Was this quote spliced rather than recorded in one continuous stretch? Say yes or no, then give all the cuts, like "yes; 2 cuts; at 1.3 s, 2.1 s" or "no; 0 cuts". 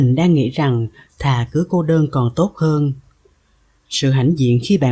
no; 0 cuts